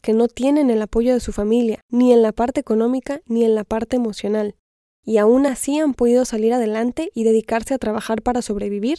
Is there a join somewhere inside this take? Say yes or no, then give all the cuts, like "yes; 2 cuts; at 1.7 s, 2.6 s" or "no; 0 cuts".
no; 0 cuts